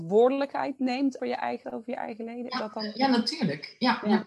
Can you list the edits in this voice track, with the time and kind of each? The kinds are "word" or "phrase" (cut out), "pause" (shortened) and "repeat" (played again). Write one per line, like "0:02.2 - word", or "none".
0:01.2 - word
0:01.6 - phrase